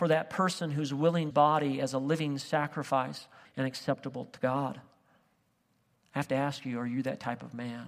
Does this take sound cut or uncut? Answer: cut